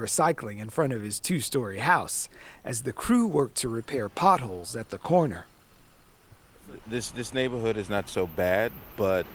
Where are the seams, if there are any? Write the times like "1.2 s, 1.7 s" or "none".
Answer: none